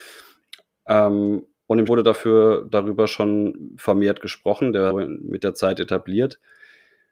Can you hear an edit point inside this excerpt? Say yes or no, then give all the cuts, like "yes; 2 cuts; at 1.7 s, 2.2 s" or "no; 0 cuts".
yes; 2 cuts; at 1.9 s, 4.9 s